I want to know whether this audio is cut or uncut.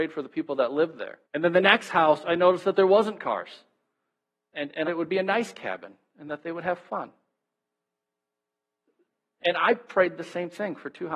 cut